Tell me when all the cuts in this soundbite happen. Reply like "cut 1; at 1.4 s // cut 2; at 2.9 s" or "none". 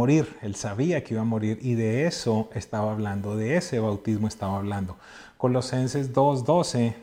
none